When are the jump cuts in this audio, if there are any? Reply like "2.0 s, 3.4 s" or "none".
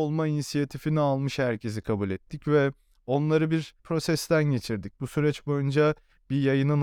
3.8 s

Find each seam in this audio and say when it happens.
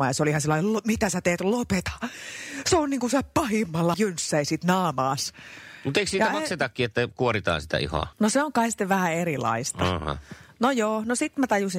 3.9 s, 8.1 s

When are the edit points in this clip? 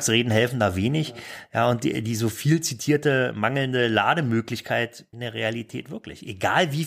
5.1 s

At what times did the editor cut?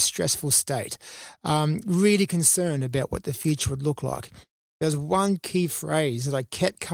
none

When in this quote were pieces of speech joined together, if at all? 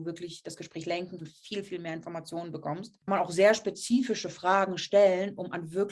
1.2 s, 3.1 s

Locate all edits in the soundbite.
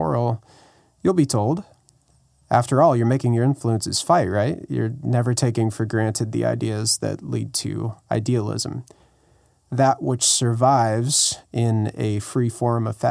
none

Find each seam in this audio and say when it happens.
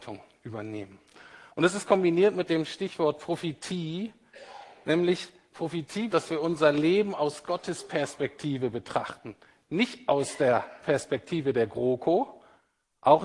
1.5 s, 6.1 s

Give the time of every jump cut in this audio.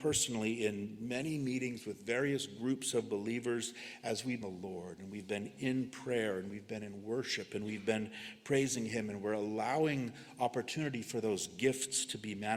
4.4 s

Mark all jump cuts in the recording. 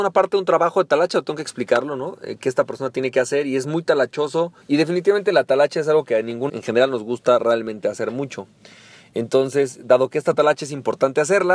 4.6 s, 6.5 s

